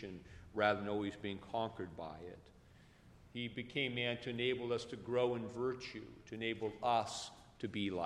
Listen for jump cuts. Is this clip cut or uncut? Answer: uncut